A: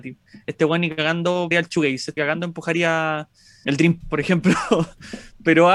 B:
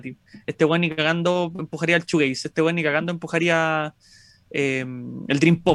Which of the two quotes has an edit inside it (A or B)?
A